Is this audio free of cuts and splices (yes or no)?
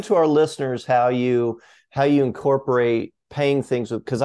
yes